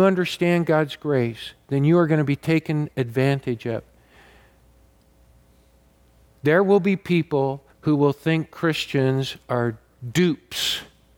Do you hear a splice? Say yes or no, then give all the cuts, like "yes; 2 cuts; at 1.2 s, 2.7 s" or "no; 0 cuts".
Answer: yes; 1 cut; at 7.7 s